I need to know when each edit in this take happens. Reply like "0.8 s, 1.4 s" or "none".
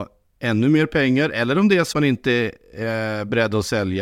1.9 s

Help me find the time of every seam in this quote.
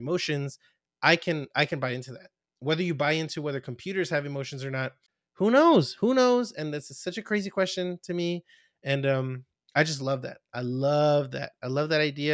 none

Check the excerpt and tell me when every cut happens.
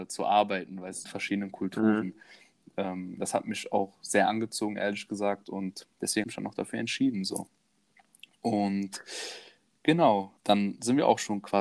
1.0 s, 6.2 s, 10.4 s

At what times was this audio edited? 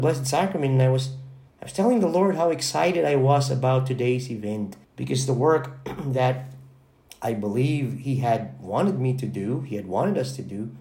1.5 s, 4.8 s

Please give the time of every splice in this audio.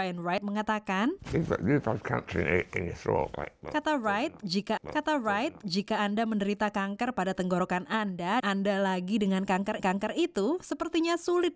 4.8 s, 8.4 s, 9.8 s

